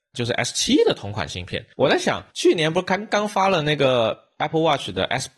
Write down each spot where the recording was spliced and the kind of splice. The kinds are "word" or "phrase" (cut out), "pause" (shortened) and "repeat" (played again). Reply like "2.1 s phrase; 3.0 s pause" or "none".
1.7 s pause; 2.3 s pause